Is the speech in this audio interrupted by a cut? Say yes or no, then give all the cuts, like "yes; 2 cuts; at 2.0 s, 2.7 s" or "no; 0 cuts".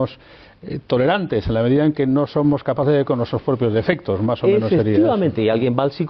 yes; 1 cut; at 3.0 s